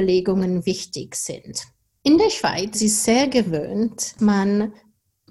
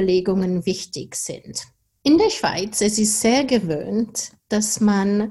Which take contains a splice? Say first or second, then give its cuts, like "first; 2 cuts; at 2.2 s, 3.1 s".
first; 2 cuts; at 2.7 s, 4.2 s